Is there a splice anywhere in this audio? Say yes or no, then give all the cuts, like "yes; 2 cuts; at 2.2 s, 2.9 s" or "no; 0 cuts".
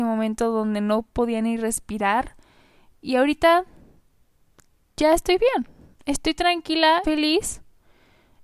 yes; 1 cut; at 7.0 s